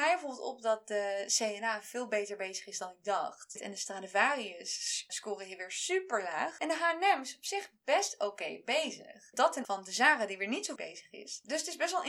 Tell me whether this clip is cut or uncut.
cut